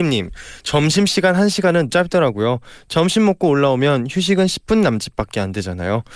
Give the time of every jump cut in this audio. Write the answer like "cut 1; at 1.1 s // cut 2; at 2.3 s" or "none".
cut 1; at 1.9 s